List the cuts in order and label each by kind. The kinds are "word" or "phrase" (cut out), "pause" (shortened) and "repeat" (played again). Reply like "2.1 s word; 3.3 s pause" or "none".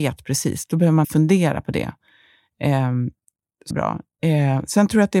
1.0 s word; 3.7 s phrase